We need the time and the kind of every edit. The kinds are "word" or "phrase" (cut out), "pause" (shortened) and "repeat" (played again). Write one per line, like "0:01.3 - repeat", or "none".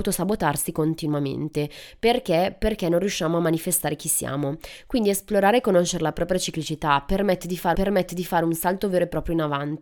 0:07.7 - repeat